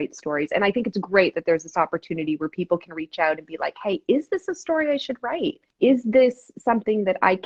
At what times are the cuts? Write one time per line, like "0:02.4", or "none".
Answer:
0:05.7